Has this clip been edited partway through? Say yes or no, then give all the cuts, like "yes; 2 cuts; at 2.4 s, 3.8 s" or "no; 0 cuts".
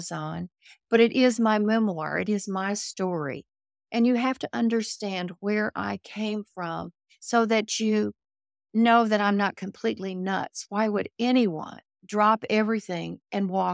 yes; 1 cut; at 11.9 s